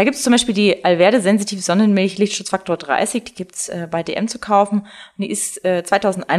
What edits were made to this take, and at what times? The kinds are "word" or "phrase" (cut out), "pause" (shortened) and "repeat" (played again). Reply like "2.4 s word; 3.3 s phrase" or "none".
none